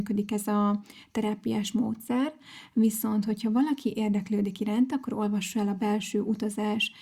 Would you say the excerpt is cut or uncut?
uncut